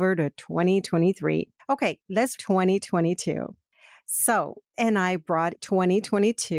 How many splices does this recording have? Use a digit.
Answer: 4